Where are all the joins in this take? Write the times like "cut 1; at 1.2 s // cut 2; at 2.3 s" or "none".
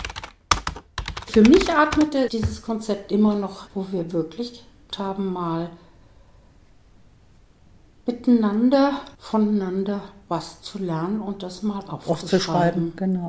cut 1; at 2.3 s // cut 2; at 3.7 s // cut 3; at 4.9 s // cut 4; at 9.1 s

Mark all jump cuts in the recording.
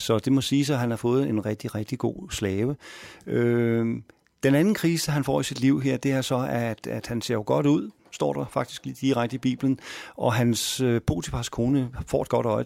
cut 1; at 1.4 s

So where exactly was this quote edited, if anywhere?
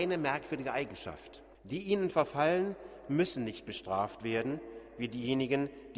cut 1; at 1.5 s

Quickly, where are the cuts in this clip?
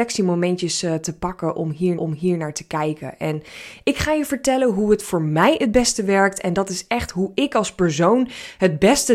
cut 1; at 2.0 s

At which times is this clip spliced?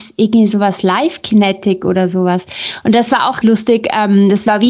cut 1; at 3.4 s

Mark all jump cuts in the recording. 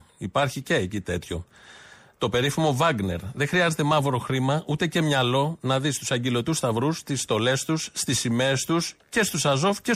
none

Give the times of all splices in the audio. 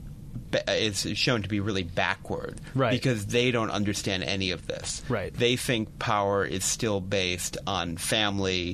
none

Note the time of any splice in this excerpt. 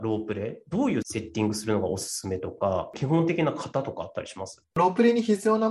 cut 1; at 4.6 s

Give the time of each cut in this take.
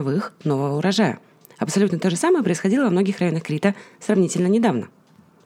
none

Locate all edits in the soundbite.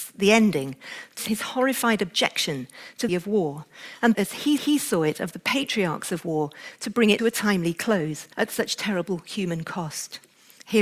cut 1; at 1.2 s // cut 2; at 3.1 s // cut 3; at 4.1 s // cut 4; at 4.6 s // cut 5; at 7.2 s // cut 6; at 8.3 s

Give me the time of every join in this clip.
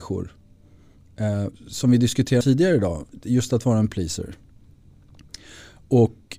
cut 1; at 1.5 s // cut 2; at 2.4 s // cut 3; at 3.9 s

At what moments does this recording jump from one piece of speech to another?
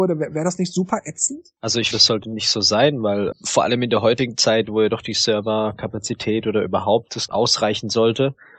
cut 1; at 1.9 s // cut 2; at 3.3 s // cut 3; at 7.3 s

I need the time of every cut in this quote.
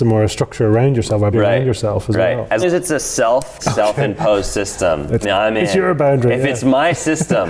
cut 1; at 1.3 s // cut 2; at 2.6 s // cut 3; at 3.6 s // cut 4; at 5.2 s

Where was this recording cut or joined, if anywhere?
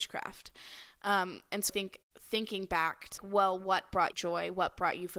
cut 1; at 1.7 s // cut 2; at 3.2 s // cut 3; at 4.1 s

